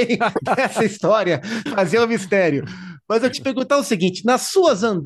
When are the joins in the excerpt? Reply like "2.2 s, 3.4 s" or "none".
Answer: 1.7 s, 3.3 s